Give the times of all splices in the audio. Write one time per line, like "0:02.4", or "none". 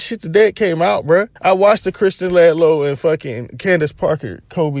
0:01.4